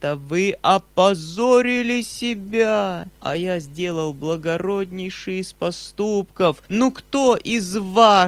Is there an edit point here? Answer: yes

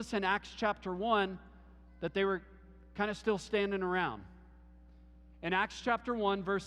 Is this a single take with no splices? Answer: yes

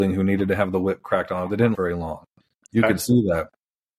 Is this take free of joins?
no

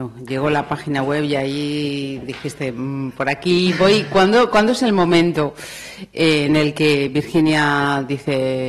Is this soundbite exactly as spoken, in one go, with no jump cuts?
yes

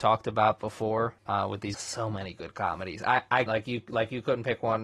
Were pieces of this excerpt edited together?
yes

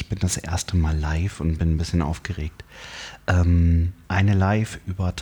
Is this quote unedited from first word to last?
no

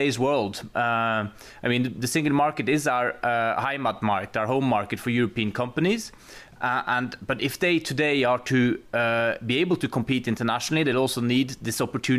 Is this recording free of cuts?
yes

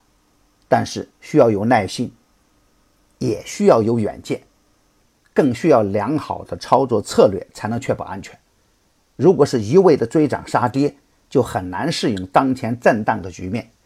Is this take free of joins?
yes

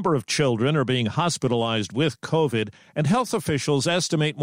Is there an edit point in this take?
no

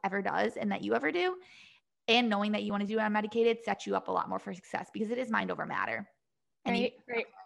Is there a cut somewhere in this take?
no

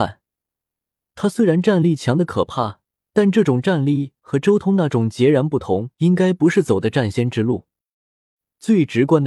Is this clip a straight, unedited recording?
no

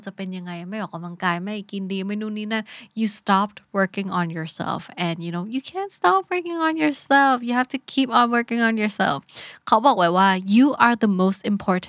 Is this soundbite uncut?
yes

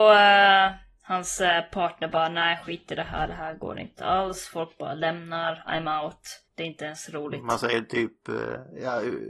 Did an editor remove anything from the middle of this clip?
yes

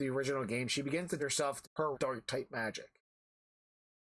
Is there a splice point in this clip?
yes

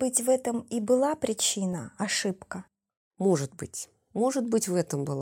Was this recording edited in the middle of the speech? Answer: no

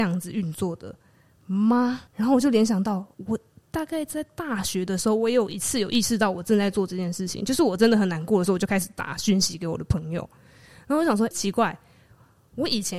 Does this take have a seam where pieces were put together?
yes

